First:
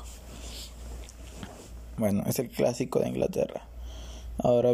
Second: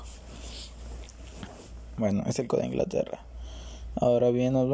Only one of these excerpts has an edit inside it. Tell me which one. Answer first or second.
second